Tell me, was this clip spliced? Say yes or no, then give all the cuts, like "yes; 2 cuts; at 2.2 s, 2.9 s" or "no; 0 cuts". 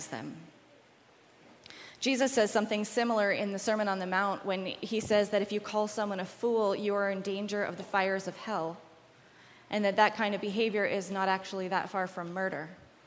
no; 0 cuts